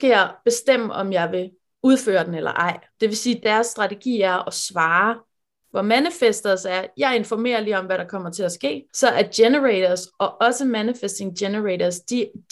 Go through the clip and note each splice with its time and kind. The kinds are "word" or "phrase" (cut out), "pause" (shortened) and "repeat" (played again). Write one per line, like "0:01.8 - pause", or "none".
0:02.9 - pause
0:03.4 - word
0:08.9 - pause